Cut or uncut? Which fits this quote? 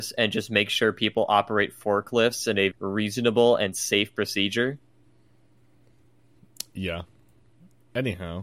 cut